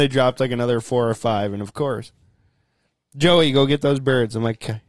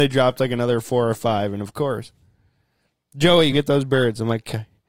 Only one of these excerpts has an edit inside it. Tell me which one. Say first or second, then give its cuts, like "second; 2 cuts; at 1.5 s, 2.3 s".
second; 1 cut; at 3.5 s